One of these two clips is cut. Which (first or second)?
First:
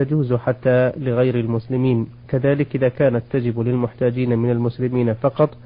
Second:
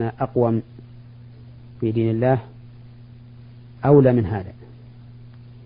first